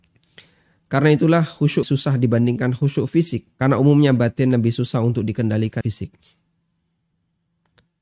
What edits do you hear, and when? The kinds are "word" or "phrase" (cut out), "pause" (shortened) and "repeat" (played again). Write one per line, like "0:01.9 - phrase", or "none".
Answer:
0:01.8 - phrase
0:03.5 - pause
0:05.8 - word